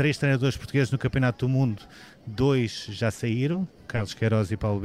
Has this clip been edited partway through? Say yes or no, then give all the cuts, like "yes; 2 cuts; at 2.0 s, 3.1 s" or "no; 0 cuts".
no; 0 cuts